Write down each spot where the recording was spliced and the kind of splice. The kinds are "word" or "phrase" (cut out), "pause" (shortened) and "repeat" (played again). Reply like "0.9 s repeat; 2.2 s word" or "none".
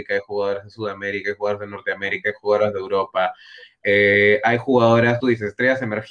5.2 s word